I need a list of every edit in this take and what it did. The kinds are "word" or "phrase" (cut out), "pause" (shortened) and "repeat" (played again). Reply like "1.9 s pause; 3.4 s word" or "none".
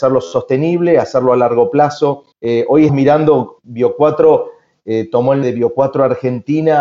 2.3 s pause; 2.9 s word; 3.6 s word; 5.4 s word